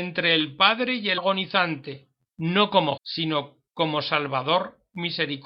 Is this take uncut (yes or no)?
no